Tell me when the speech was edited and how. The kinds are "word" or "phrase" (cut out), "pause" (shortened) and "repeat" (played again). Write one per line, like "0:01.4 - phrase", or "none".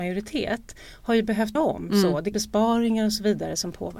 0:01.6 - word
0:02.3 - phrase